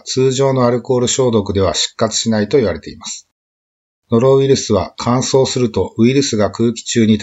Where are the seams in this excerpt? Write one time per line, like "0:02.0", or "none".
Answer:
none